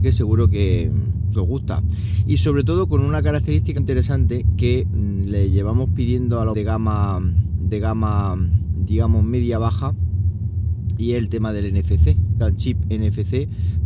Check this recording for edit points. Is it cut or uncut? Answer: cut